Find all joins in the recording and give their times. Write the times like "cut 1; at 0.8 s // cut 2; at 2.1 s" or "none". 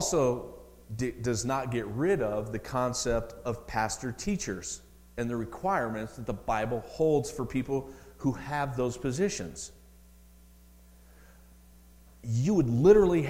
none